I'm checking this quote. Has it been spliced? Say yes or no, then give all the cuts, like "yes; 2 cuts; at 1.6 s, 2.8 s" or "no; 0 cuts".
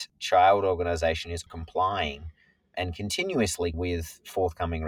yes; 2 cuts; at 1.5 s, 3.7 s